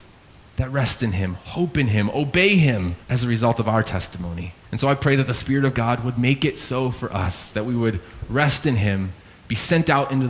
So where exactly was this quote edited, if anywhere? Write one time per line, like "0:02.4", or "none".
0:03.0
0:04.6